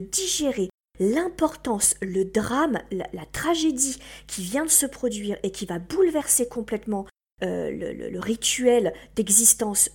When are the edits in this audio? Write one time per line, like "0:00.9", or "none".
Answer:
none

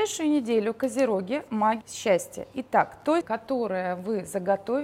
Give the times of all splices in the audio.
0:01.8
0:03.2

